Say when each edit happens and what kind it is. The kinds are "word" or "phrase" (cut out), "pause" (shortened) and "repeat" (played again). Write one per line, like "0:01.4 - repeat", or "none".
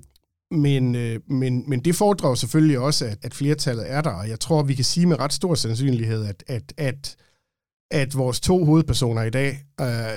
0:03.2 - word